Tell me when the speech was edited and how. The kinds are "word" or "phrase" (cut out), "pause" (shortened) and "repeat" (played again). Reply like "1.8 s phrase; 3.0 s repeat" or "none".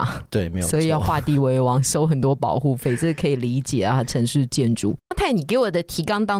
5.1 s phrase

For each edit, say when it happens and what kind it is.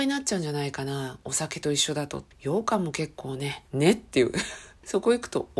2.3 s pause; 3.7 s pause

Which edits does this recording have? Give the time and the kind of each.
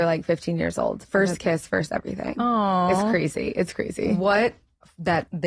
none

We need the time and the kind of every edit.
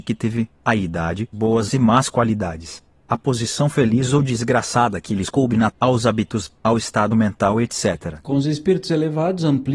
1.3 s word; 5.7 s word

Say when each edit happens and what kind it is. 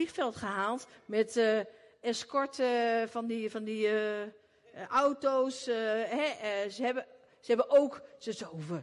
none

